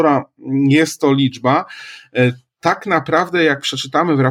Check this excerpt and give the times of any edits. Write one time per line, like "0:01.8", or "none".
none